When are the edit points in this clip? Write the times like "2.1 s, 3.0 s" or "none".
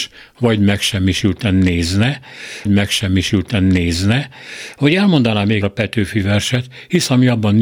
2.7 s, 5.6 s